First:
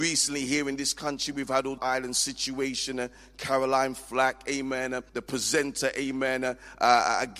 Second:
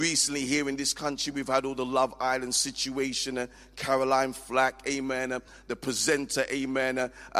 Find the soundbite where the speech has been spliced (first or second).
first